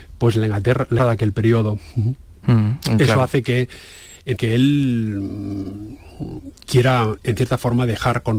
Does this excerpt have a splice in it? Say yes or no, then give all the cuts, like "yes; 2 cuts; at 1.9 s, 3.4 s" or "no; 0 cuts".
yes; 2 cuts; at 1.0 s, 4.4 s